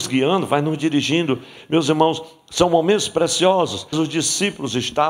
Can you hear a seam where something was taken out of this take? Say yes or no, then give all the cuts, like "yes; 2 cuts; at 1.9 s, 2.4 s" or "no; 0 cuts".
yes; 1 cut; at 3.9 s